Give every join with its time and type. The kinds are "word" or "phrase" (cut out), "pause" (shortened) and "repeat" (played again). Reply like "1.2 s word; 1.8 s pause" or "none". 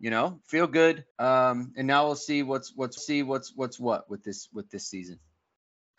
1.1 s pause; 3.0 s repeat